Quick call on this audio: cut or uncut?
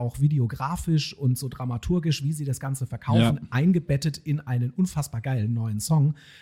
uncut